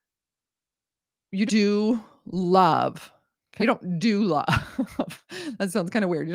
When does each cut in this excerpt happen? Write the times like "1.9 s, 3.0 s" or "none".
1.5 s, 3.6 s